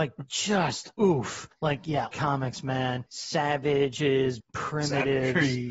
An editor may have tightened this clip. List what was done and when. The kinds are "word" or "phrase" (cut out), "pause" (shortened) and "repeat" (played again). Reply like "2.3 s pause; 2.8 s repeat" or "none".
0.9 s pause; 2.1 s word; 4.4 s word